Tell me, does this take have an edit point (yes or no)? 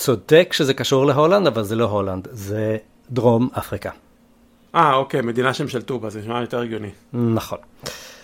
no